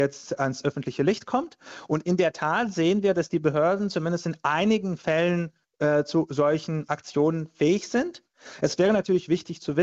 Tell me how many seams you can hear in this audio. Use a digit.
0